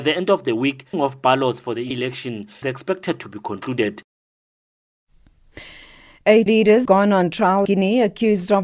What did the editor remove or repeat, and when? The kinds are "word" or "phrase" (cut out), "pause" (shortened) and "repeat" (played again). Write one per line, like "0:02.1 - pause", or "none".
0:00.9 - word
0:01.9 - word
0:02.6 - word
0:06.5 - word
0:06.9 - word
0:07.7 - word